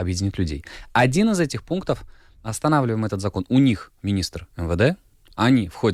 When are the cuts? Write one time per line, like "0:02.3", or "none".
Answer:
none